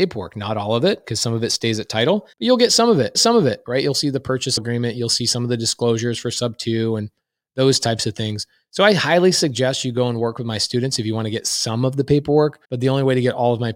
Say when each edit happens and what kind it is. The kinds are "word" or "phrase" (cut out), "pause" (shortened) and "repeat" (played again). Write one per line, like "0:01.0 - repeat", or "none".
0:02.3 - pause
0:03.1 - repeat
0:04.6 - phrase
0:12.6 - pause